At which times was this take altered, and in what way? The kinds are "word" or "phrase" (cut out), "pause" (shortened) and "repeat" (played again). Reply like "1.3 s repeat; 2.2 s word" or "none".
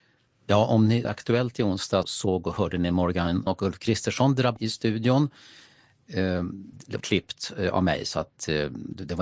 1.0 s word; 2.0 s word; 3.5 s word; 4.6 s word; 7.0 s word

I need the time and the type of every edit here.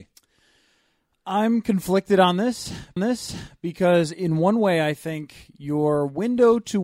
3.0 s repeat

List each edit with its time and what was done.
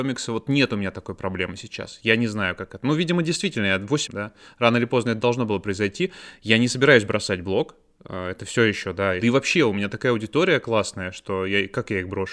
4.1 s phrase; 9.2 s phrase

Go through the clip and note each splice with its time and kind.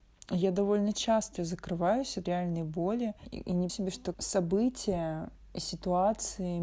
1.4 s word; 2.2 s word; 3.7 s word; 4.1 s word

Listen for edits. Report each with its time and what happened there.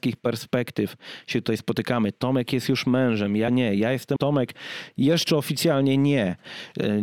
3.5 s word; 4.2 s word

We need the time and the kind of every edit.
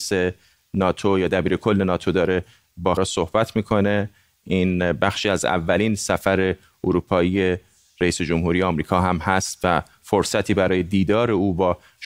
3.0 s word

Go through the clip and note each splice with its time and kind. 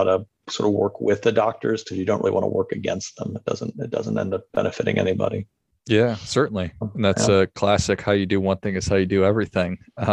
none

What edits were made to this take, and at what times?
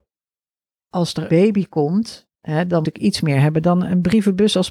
1.3 s word; 2.3 s pause; 2.8 s word

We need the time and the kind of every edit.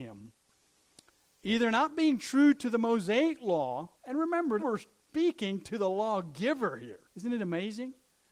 4.0 s pause; 4.6 s word; 7.1 s pause

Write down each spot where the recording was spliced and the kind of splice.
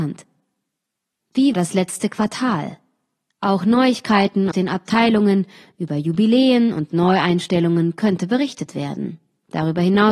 1.5 s word; 4.5 s word

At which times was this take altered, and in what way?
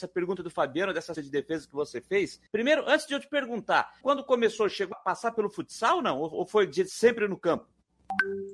1.1 s word; 2.5 s pause; 4.0 s phrase; 4.9 s word

